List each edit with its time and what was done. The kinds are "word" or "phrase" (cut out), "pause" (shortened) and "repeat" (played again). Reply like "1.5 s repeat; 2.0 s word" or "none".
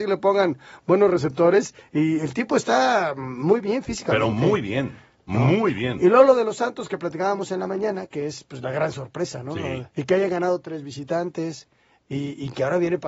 9.9 s pause